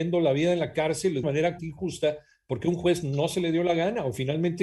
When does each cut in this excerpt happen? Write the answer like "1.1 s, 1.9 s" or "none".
1.2 s, 1.6 s